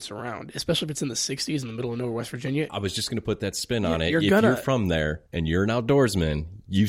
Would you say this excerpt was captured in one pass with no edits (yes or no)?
no